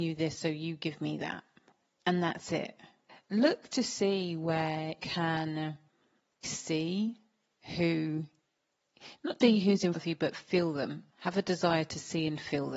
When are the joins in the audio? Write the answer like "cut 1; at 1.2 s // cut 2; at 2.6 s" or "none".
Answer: cut 1; at 5.0 s // cut 2; at 6.4 s // cut 3; at 9.4 s // cut 4; at 9.9 s